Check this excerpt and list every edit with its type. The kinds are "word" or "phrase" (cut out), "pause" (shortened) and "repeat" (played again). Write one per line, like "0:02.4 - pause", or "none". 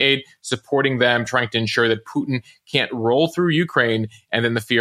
none

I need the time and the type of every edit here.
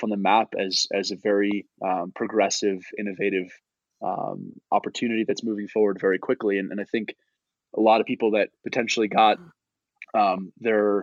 0:01.7 - pause
0:08.6 - pause

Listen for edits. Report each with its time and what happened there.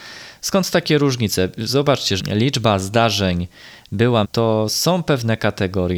0:02.2 - phrase
0:04.2 - word

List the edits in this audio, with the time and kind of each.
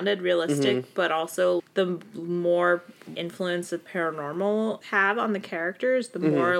0:01.6 - word
0:03.1 - word
0:03.9 - word
0:04.8 - word

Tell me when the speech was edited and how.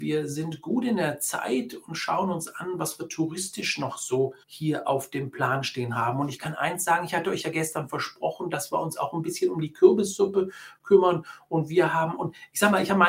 0:04.4 - pause

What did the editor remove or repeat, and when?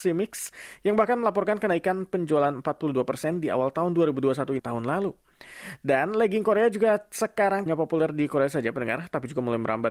0:04.6 - phrase
0:07.7 - word

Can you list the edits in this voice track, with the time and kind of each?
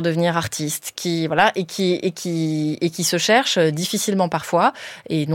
none

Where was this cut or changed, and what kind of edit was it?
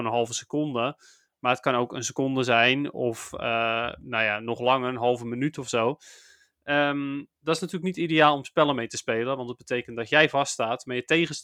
none

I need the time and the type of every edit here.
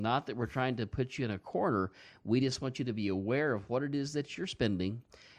none

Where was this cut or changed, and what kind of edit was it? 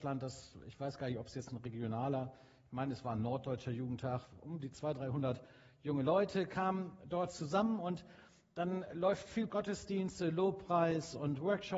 0:09.5 - phrase

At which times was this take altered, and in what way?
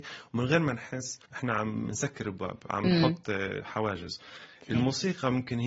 0:01.3 - pause
0:03.6 - word

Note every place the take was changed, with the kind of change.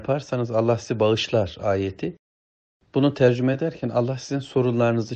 none

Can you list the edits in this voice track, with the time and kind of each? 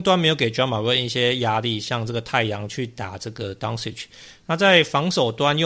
none

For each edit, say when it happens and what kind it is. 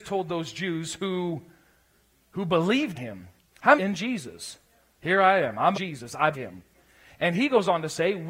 0:02.9 - word
0:03.8 - phrase
0:05.7 - phrase
0:06.3 - word

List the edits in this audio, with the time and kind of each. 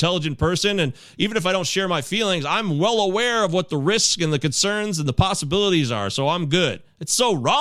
none

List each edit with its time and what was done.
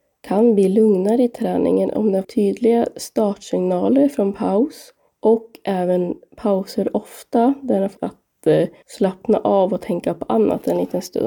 0:02.2 - word
0:08.0 - word

